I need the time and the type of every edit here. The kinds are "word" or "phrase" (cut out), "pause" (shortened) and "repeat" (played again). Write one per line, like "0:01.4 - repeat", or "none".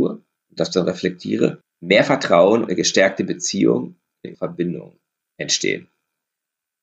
0:01.6 - pause
0:02.7 - word
0:04.3 - word